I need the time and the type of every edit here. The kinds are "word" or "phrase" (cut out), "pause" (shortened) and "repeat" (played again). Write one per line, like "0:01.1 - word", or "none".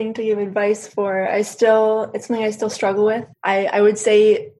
0:03.4 - pause